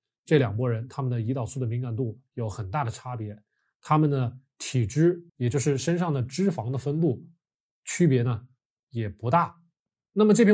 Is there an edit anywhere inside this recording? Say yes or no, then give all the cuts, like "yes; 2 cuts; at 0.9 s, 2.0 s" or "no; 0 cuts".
yes; 1 cut; at 5.3 s